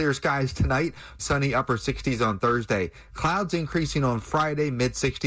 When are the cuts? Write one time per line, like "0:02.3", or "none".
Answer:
0:01.2